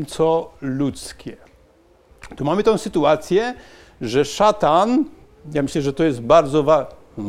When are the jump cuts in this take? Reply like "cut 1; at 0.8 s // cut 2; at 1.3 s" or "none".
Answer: none

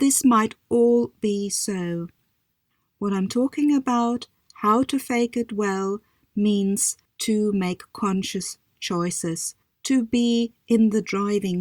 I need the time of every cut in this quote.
none

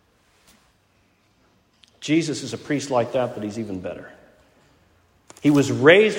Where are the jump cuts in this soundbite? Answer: none

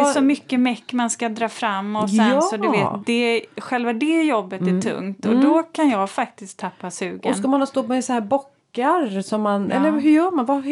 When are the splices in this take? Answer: none

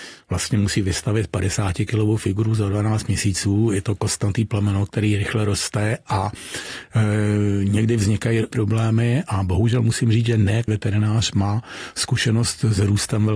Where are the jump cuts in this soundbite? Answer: cut 1; at 8.5 s // cut 2; at 10.7 s

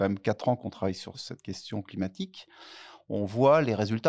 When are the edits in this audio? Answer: cut 1; at 1.1 s

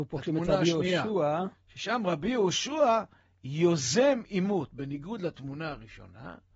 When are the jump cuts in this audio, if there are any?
none

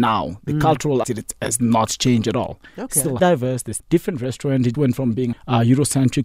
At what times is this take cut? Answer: cut 1; at 1.0 s // cut 2; at 3.2 s // cut 3; at 3.8 s // cut 4; at 4.7 s // cut 5; at 5.3 s

